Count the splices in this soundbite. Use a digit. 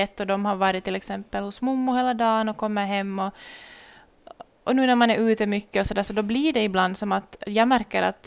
0